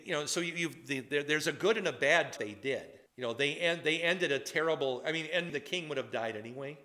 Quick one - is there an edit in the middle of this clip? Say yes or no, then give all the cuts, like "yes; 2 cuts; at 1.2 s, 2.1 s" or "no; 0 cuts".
yes; 3 cuts; at 2.4 s, 3.1 s, 5.5 s